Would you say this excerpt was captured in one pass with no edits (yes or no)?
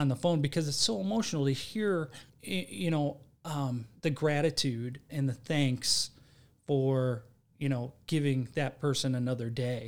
no